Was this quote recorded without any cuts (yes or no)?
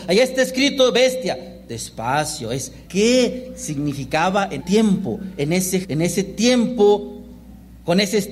no